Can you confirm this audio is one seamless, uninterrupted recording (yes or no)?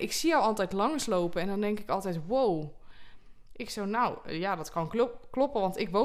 yes